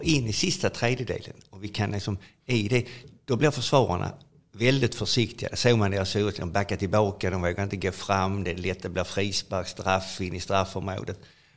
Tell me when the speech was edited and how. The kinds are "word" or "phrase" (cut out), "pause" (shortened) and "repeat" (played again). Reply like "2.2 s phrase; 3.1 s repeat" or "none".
none